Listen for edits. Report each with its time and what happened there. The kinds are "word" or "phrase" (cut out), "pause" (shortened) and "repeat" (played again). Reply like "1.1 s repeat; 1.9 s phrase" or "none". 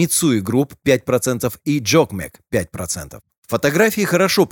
none